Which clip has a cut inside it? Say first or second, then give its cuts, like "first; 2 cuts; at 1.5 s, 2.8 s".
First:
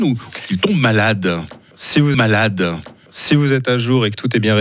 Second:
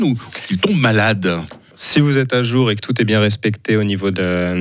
first; 1 cut; at 2.1 s